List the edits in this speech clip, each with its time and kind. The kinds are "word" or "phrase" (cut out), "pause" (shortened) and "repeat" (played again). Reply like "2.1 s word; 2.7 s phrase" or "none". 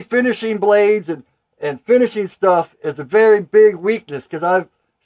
none